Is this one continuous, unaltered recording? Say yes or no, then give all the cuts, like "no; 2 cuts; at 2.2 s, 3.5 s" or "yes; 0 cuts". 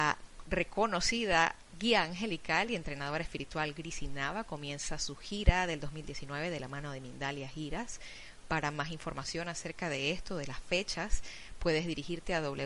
yes; 0 cuts